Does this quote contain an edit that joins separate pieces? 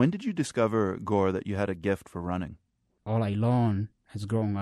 no; 0 cuts

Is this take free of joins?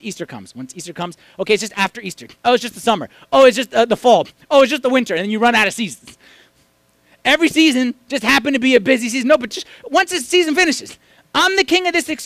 yes; 0 cuts

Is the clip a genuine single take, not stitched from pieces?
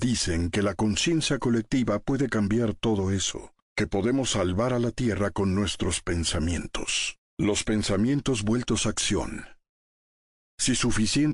no; 2 cuts; at 3.6 s, 7.3 s

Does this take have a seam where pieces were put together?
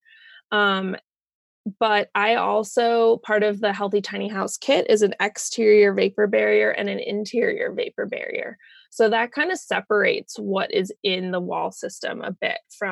no; 0 cuts

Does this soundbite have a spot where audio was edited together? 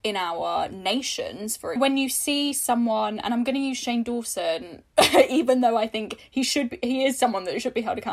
yes; 1 cut; at 1.8 s

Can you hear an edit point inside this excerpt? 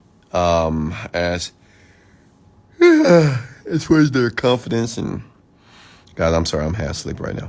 no; 0 cuts

